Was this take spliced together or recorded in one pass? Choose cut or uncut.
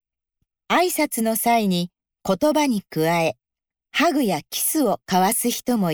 uncut